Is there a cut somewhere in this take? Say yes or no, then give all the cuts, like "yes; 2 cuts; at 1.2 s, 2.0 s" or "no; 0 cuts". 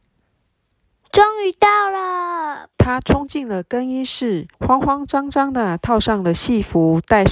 yes; 2 cuts; at 2.7 s, 4.5 s